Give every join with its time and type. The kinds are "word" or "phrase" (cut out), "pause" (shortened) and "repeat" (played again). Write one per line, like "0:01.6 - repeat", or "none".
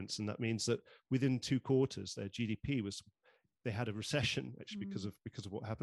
none